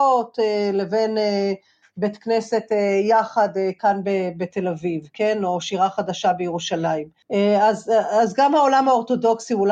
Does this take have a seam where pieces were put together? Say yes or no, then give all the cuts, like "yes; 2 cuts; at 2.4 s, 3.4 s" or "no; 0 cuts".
no; 0 cuts